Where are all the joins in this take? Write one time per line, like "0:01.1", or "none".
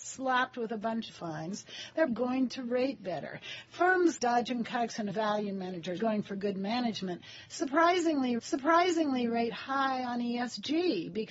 0:01.1
0:02.1
0:04.2
0:05.1
0:06.0
0:08.4